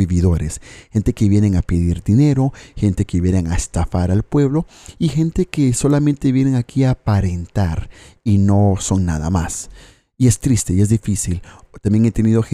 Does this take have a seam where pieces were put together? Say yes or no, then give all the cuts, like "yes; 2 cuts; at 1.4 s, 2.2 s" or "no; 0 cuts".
no; 0 cuts